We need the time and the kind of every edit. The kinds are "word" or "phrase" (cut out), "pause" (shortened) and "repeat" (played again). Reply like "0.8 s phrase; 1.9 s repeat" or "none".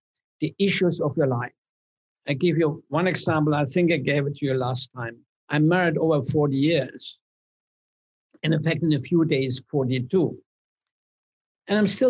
5.3 s pause